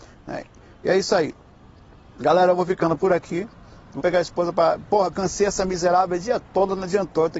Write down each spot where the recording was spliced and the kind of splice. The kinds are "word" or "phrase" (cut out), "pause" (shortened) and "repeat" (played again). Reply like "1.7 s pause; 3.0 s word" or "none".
4.0 s word; 5.1 s word